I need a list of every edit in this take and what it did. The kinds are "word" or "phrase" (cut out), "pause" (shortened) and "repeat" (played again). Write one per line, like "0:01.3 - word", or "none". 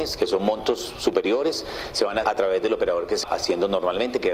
0:02.2 - word
0:03.2 - word